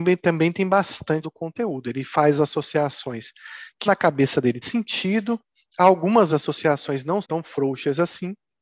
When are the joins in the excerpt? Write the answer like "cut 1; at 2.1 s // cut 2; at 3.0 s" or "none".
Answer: cut 1; at 1.2 s // cut 2; at 2.4 s // cut 3; at 3.9 s // cut 4; at 4.6 s // cut 5; at 6.3 s // cut 6; at 7.2 s

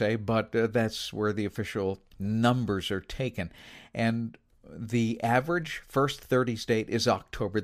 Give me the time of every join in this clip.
cut 1; at 2.1 s

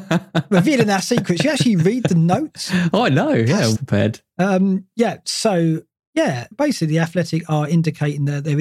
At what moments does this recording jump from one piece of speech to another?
cut 1; at 3.7 s // cut 2; at 6.5 s

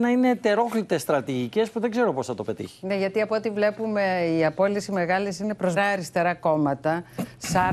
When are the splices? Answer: cut 1; at 5.8 s

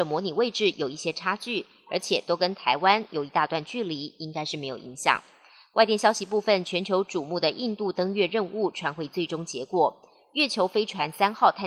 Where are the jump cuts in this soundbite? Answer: none

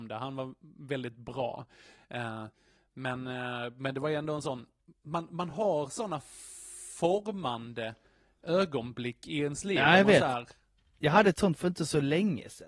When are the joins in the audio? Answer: none

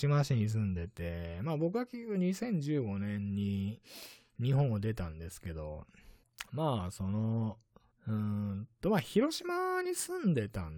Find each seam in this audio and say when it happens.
none

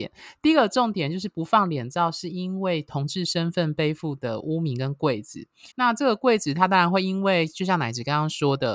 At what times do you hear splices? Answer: cut 1; at 5.7 s

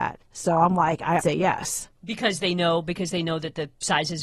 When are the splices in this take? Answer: cut 1; at 1.2 s // cut 2; at 2.0 s

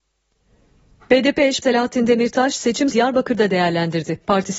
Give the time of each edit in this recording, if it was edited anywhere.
cut 1; at 1.6 s // cut 2; at 2.9 s

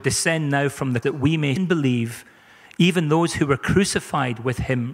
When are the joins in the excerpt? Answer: cut 1; at 1.0 s // cut 2; at 1.6 s

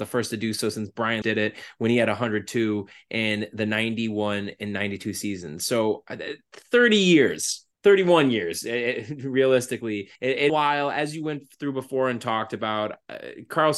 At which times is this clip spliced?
cut 1; at 1.2 s // cut 2; at 7.7 s // cut 3; at 10.2 s // cut 4; at 10.5 s

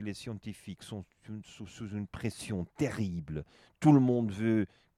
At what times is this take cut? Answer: none

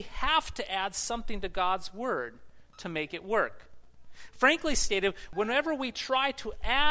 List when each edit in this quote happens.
none

